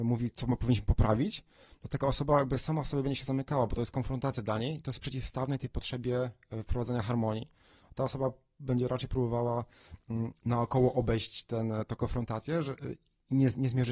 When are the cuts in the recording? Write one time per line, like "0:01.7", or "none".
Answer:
none